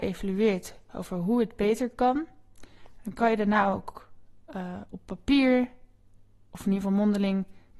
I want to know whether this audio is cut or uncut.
uncut